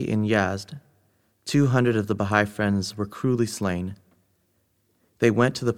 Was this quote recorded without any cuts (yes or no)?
yes